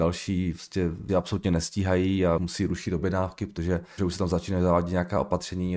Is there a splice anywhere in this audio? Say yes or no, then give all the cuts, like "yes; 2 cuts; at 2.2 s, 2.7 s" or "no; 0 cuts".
yes; 3 cuts; at 1.1 s, 2.4 s, 4.0 s